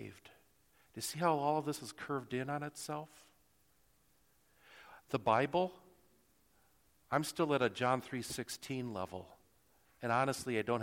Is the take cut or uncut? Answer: uncut